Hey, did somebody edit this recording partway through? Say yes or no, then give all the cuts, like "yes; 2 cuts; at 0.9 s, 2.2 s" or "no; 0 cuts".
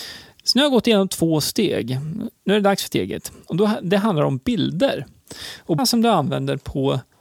yes; 3 cuts; at 2.4 s, 2.9 s, 5.8 s